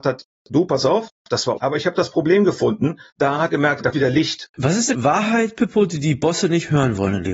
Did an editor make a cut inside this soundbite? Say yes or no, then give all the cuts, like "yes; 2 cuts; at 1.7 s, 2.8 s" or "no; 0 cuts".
yes; 5 cuts; at 1.6 s, 3.1 s, 3.5 s, 3.9 s, 4.9 s